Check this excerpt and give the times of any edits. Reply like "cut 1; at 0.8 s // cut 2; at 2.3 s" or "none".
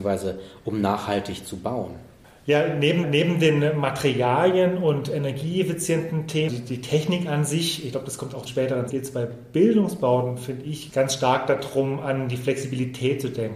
cut 1; at 3.0 s // cut 2; at 6.5 s // cut 3; at 8.5 s // cut 4; at 8.9 s